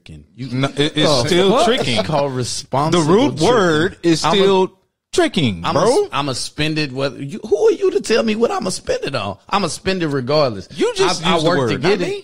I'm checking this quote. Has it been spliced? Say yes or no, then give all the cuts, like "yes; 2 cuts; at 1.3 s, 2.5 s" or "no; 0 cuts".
no; 0 cuts